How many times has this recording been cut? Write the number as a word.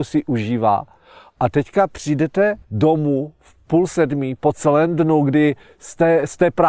one